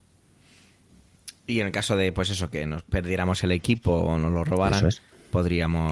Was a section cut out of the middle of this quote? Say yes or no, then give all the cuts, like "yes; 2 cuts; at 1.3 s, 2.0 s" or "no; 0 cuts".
no; 0 cuts